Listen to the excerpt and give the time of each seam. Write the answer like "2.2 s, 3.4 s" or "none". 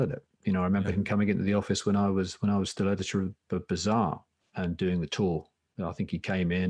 none